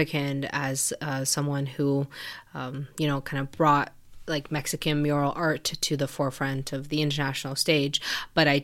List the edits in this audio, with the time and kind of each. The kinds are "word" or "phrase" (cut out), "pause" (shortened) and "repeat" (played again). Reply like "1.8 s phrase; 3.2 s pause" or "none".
none